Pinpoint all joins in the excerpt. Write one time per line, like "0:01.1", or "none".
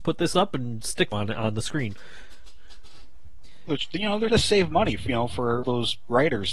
0:01.1
0:03.7
0:04.3
0:05.6

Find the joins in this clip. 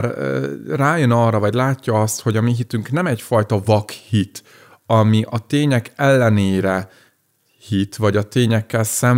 none

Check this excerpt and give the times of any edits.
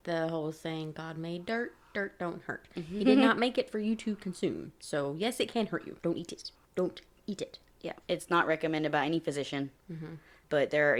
0:06.0
0:06.6
0:08.0
0:09.8

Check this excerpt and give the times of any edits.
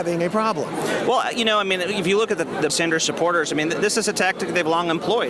0:02.7

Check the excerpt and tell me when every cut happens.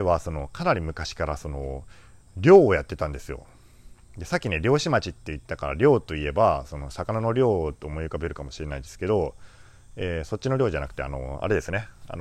0:02.2

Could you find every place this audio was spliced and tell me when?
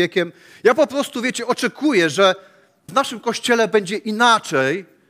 0:02.9

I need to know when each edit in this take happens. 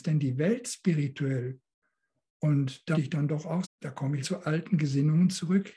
0:02.9
0:03.6
0:04.2

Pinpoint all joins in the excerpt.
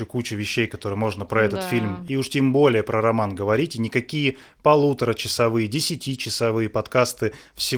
none

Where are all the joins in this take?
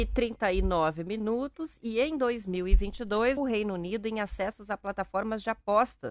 0:03.4

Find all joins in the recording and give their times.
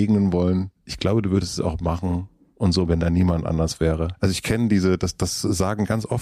0:02.9

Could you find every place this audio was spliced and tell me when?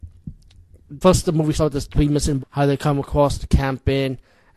0:01.0
0:01.5
0:02.4

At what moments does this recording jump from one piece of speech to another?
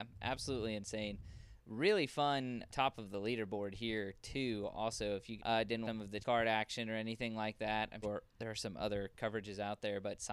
0:02.7
0:05.4
0:05.9
0:06.2
0:08.0

